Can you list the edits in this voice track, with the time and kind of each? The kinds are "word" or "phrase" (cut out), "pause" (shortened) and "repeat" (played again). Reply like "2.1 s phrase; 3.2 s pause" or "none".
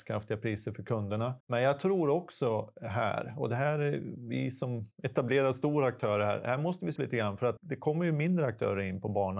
1.4 s pause; 4.9 s pause; 7.0 s word; 7.6 s word